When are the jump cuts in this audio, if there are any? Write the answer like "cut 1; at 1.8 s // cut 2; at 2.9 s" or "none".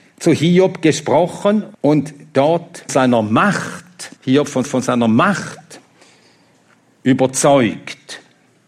cut 1; at 1.7 s // cut 2; at 2.9 s // cut 3; at 4.2 s // cut 4; at 4.6 s